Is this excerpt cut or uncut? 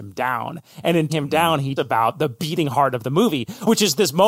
cut